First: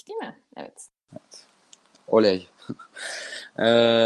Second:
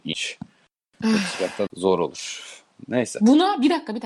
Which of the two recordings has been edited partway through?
second; 1 cut; at 1.7 s

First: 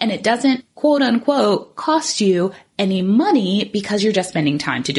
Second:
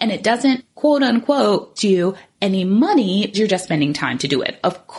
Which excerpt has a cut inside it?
second; 2 cuts; at 1.8 s, 3.3 s

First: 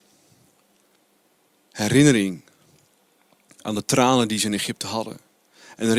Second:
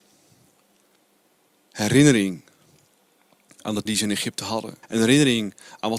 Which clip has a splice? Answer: second; 2 cuts; at 3.9 s, 4.8 s

